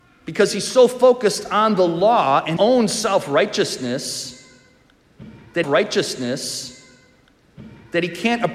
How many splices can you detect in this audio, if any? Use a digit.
2